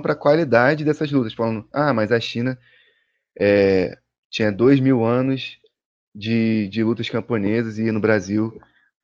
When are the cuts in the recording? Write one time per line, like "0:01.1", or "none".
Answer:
none

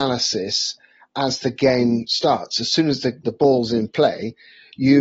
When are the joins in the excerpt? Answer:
0:03.2

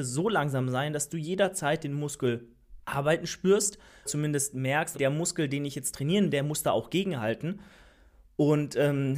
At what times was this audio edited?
0:02.8
0:04.1
0:04.9
0:06.3

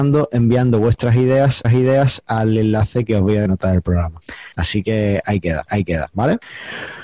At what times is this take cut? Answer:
0:01.6
0:03.5
0:05.7

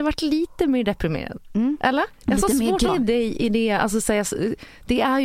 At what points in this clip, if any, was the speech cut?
0:02.9

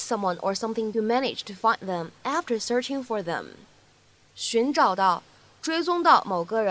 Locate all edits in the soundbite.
0:00.9

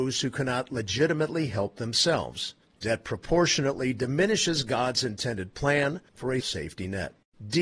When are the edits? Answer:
0:02.6
0:06.1
0:06.4

